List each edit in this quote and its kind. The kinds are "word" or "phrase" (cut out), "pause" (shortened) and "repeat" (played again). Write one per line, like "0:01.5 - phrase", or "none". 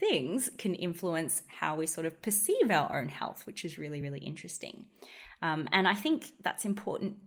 none